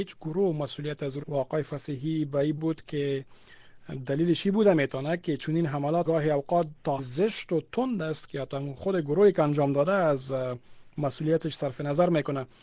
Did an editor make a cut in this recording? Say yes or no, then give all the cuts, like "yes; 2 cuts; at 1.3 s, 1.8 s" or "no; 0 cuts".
yes; 4 cuts; at 1.2 s, 2.6 s, 6.0 s, 7.0 s